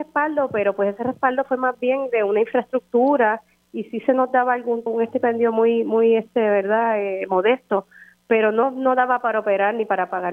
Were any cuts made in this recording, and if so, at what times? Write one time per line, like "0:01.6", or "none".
0:04.9